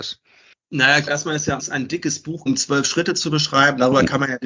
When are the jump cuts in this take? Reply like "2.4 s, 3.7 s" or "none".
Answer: 1.1 s, 1.6 s, 2.5 s